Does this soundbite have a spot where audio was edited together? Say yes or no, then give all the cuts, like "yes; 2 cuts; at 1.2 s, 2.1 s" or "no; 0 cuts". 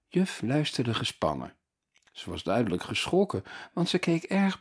no; 0 cuts